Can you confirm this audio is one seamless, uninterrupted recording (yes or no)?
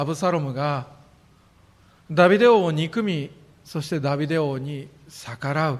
yes